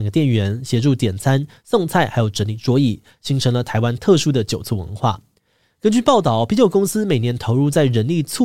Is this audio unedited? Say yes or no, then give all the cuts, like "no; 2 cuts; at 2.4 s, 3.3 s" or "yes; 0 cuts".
yes; 0 cuts